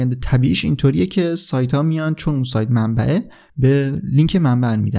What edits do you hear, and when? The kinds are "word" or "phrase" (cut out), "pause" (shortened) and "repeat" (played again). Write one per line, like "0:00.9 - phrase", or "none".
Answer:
none